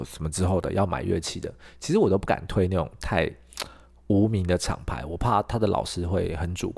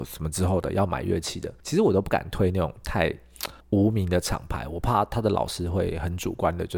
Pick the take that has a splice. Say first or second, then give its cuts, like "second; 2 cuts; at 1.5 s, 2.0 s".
second; 2 cuts; at 1.6 s, 3.6 s